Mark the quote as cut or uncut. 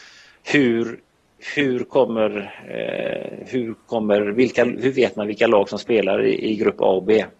uncut